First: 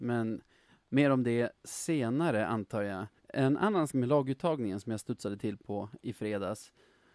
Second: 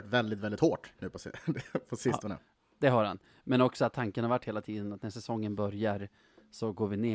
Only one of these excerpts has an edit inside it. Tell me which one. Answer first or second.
first